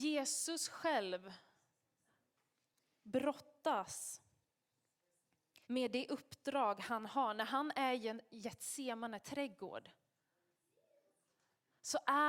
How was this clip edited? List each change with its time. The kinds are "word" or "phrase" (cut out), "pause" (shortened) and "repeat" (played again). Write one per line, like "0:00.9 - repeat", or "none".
0:05.6 - pause